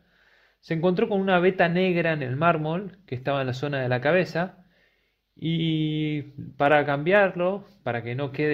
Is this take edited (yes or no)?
no